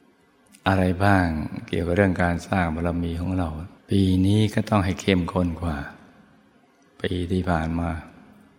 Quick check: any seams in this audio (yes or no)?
yes